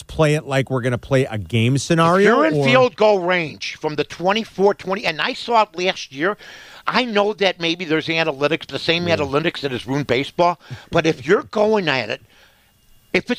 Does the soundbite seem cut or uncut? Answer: uncut